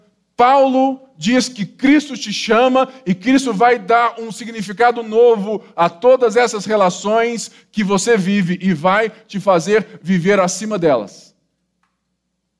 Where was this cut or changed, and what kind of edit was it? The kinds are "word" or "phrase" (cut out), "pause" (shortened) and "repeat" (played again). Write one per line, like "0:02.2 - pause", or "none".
none